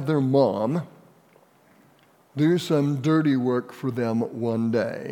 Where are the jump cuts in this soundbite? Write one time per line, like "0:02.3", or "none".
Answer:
none